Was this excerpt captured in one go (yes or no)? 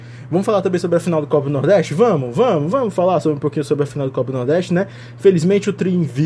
yes